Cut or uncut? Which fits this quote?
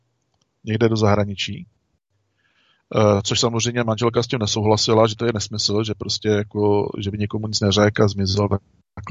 uncut